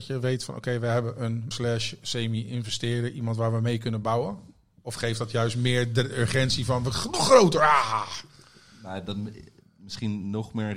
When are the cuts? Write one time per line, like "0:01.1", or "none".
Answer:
0:01.5